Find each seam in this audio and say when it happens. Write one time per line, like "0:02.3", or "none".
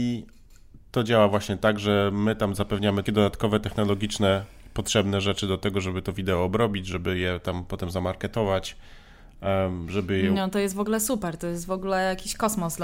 0:03.1